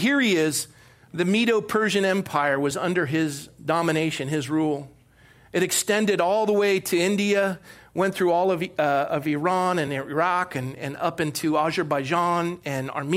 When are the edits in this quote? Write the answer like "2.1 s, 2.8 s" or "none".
none